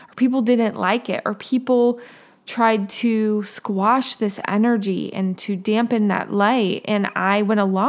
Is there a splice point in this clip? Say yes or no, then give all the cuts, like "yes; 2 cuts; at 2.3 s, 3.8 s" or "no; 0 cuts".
no; 0 cuts